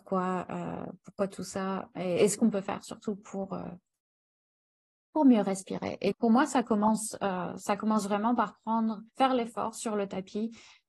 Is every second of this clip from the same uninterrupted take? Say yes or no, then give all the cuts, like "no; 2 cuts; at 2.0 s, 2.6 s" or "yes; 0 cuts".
no; 2 cuts; at 6.1 s, 9.1 s